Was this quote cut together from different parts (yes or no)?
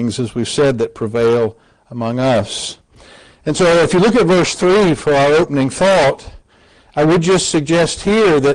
no